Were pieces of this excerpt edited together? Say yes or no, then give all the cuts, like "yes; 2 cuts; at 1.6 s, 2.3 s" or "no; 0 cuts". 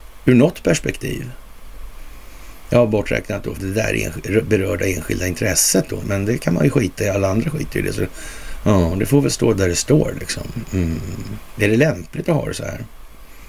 yes; 2 cuts; at 3.6 s, 6.0 s